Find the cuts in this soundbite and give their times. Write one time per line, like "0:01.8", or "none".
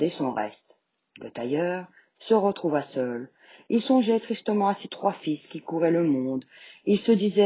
none